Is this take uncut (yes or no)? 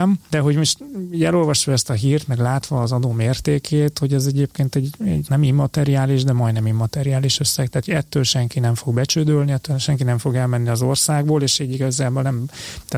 yes